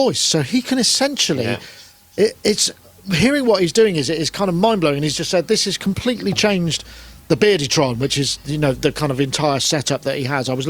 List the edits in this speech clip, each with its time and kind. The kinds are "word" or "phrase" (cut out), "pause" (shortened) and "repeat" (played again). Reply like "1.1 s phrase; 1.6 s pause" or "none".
8.7 s word

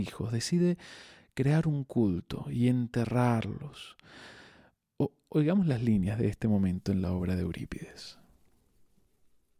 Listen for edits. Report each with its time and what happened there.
none

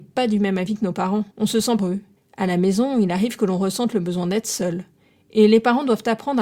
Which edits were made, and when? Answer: 1.3 s pause; 1.8 s phrase; 2.2 s pause

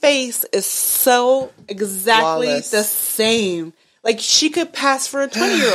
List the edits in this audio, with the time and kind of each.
none

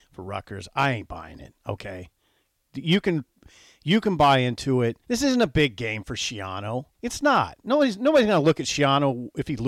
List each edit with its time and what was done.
5.0 s pause; 6.9 s pause

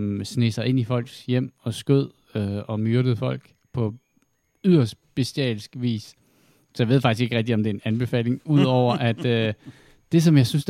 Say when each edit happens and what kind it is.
none

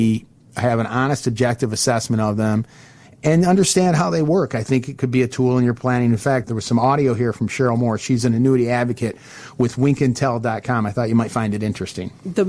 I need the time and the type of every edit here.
none

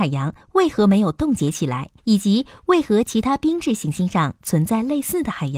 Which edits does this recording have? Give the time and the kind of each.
2.0 s pause

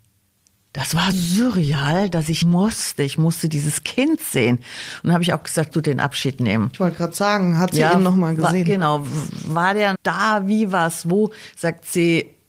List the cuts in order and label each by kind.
1.1 s word; 2.4 s word; 5.7 s word; 9.9 s word

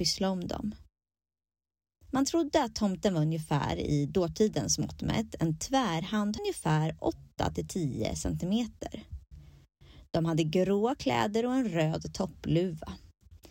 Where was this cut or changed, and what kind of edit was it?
6.4 s phrase

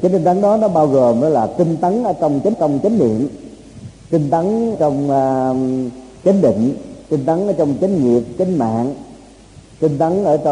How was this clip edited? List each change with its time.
2.5 s repeat; 4.7 s word; 7.0 s pause

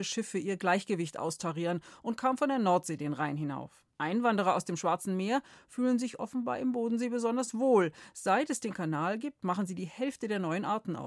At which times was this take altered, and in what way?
3.9 s pause

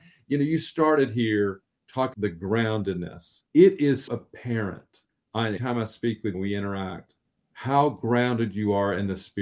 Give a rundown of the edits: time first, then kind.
2.1 s word; 3.5 s pause; 4.1 s word; 5.1 s pause; 5.6 s word; 6.3 s word; 7.2 s pause

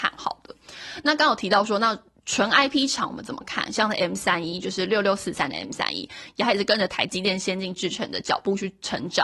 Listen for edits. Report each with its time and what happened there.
none

